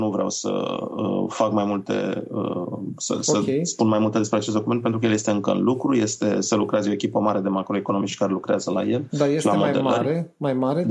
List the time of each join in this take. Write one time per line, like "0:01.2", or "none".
none

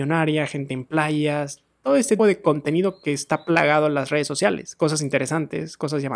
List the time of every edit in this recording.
0:02.2

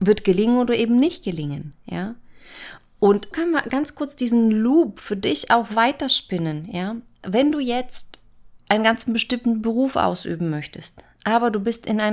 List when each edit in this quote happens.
0:03.3
0:08.6

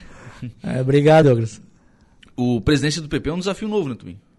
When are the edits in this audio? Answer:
0:01.2

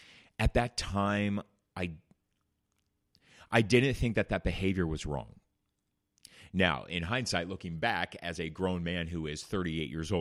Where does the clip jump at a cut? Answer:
none

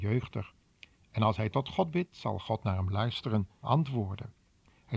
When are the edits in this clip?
0:03.6

